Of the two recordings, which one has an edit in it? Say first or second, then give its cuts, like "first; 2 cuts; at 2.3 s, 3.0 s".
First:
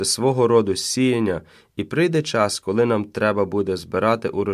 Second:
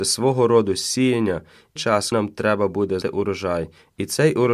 second; 3 cuts; at 1.8 s, 2.1 s, 3.0 s